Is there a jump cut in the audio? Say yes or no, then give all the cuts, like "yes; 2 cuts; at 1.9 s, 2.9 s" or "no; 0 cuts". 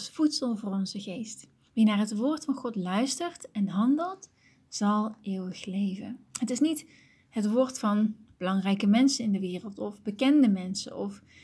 yes; 2 cuts; at 1.7 s, 6.3 s